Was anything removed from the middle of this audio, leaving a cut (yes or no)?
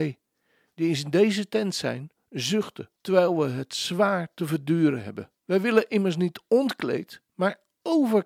yes